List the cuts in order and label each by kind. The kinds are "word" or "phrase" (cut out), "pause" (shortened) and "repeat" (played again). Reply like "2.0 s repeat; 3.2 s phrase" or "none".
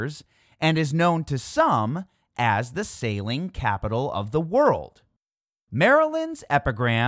none